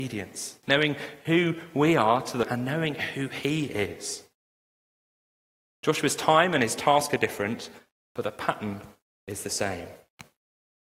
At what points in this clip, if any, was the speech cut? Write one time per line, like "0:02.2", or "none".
0:02.4